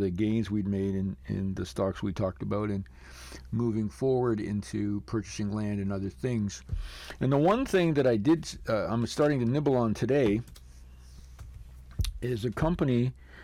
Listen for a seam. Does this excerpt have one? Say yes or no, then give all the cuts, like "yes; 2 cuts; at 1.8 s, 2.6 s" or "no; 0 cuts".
yes; 1 cut; at 1.2 s